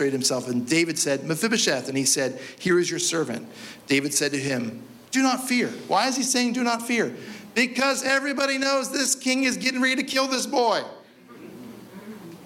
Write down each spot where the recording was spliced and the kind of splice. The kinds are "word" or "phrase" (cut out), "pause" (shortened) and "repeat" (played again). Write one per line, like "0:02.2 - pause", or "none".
0:05.1 - pause